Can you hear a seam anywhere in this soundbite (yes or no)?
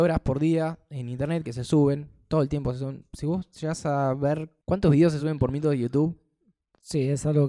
no